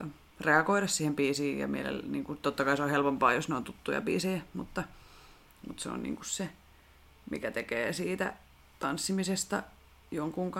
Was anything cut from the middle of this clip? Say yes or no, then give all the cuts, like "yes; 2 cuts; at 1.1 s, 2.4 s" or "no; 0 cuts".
no; 0 cuts